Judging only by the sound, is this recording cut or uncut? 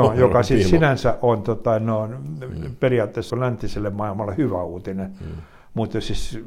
cut